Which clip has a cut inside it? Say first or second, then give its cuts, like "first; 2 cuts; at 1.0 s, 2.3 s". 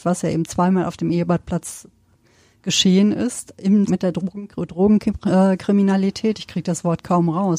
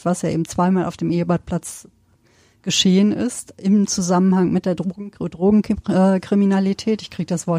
first; 1 cut; at 3.9 s